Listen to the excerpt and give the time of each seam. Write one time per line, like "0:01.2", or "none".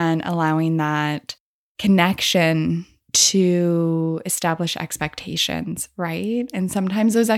none